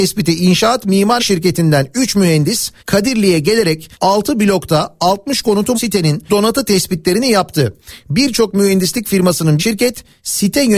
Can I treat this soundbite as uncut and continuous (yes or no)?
no